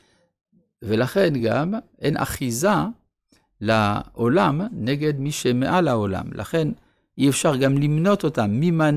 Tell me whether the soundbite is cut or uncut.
uncut